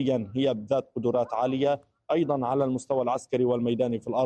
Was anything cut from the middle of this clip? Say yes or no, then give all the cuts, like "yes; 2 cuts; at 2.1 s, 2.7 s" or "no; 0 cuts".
no; 0 cuts